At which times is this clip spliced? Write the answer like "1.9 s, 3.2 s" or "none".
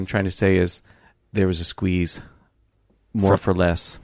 none